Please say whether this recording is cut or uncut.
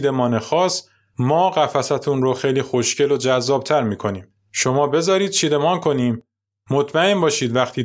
uncut